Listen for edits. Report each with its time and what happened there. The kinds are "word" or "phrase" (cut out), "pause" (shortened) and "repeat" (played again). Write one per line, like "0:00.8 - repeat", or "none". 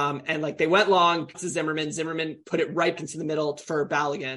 0:01.3 - word
0:03.0 - word